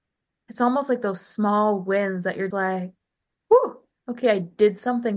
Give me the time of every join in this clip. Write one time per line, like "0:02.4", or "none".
0:02.5